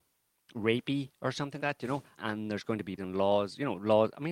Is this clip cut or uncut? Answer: cut